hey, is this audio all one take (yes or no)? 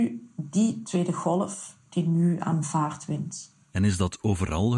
yes